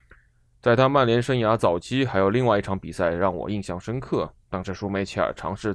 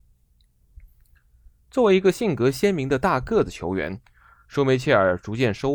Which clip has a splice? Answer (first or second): first